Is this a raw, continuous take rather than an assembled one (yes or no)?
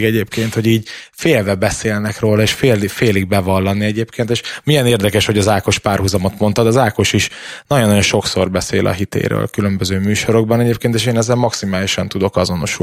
yes